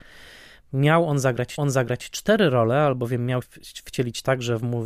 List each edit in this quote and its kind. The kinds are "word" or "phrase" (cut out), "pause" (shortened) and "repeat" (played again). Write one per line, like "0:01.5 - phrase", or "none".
0:01.6 - repeat
0:03.4 - word

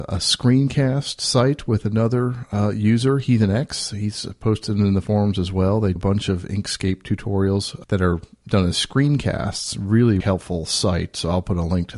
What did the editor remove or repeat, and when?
0:06.0 - word
0:07.8 - word
0:10.2 - word

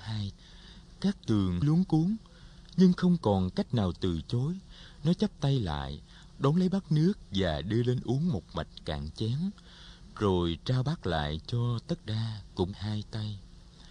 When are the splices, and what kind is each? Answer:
0:01.6 - word
0:12.0 - word
0:12.7 - word

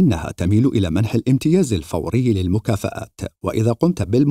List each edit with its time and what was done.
none

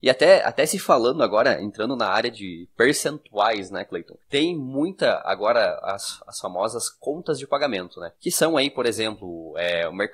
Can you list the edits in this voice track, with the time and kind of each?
0:04.2 - pause
0:08.1 - pause

